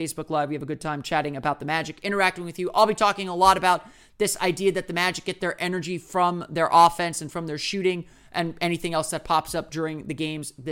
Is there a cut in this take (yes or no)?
no